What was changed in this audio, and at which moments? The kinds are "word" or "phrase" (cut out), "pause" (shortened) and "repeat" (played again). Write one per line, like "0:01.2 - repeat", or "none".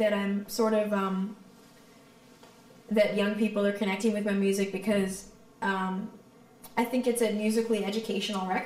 none